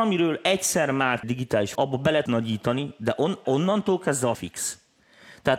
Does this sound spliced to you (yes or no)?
yes